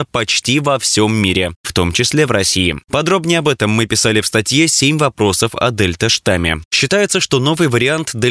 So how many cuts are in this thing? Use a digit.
0